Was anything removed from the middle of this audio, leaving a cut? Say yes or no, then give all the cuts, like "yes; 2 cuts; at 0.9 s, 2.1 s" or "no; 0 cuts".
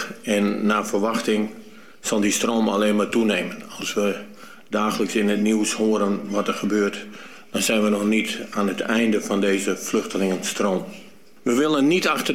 no; 0 cuts